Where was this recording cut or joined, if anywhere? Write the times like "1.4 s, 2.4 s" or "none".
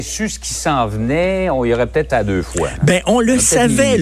2.1 s